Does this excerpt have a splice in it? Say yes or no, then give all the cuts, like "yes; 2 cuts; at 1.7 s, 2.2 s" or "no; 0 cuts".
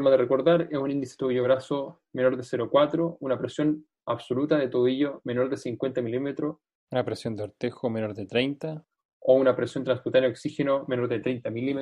no; 0 cuts